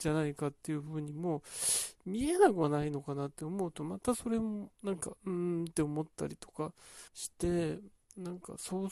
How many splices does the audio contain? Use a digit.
2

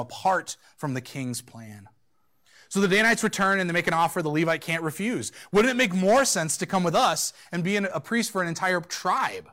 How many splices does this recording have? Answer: 0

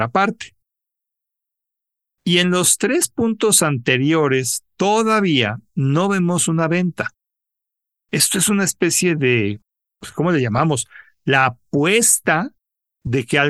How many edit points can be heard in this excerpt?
0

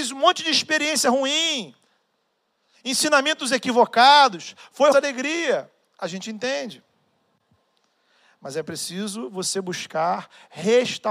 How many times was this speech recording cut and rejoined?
1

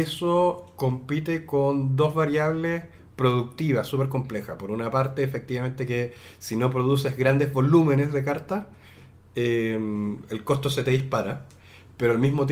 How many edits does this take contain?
0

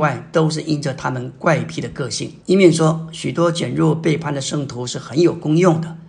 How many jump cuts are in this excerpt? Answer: 1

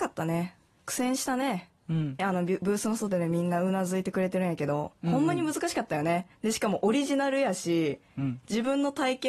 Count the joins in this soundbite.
2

